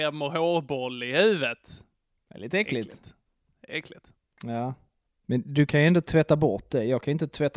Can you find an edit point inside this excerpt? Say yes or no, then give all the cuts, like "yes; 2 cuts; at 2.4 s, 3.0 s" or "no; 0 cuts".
no; 0 cuts